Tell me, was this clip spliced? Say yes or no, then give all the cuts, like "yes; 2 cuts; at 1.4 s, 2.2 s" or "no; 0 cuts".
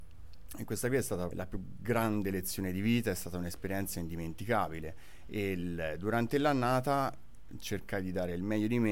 yes; 1 cut; at 1.3 s